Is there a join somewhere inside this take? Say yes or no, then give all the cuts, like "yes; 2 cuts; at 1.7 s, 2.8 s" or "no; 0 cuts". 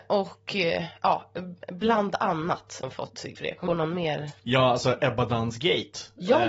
yes; 4 cuts; at 2.8 s, 3.4 s, 3.7 s, 4.4 s